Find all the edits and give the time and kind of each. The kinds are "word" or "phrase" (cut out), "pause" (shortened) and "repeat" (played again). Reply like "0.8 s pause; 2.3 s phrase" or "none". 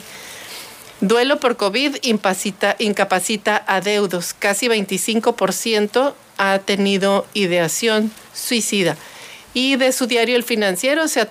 0.9 s pause; 8.3 s pause